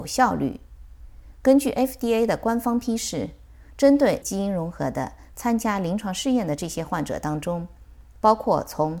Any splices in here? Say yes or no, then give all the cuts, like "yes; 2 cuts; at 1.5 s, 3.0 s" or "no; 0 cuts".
yes; 1 cut; at 4.2 s